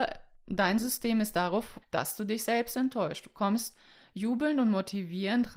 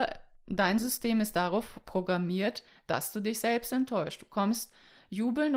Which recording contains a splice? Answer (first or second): first